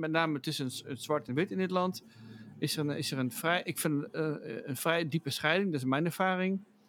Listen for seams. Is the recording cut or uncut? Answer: uncut